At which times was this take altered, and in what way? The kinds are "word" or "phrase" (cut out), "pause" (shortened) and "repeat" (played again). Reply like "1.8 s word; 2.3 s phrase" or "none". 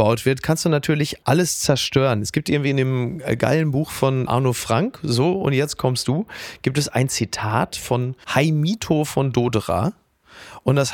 4.3 s word; 8.2 s pause